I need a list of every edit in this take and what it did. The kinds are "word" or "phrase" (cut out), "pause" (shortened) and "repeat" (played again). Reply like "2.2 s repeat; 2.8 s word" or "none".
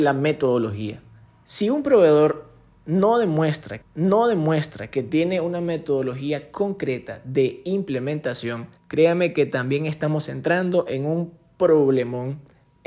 1.2 s pause; 3.8 s repeat; 8.8 s pause